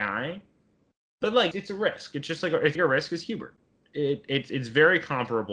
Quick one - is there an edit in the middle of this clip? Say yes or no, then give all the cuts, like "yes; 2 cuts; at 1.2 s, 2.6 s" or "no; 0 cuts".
yes; 2 cuts; at 1.5 s, 2.7 s